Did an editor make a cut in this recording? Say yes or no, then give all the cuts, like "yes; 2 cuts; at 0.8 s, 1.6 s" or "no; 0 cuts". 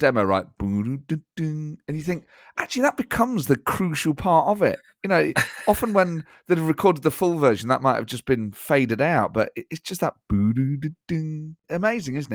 no; 0 cuts